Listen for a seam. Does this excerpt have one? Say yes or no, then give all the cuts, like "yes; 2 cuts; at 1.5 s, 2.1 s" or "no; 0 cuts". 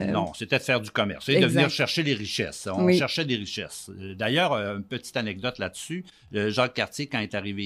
no; 0 cuts